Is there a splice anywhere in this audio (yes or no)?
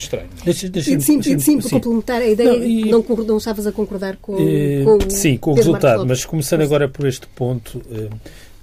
yes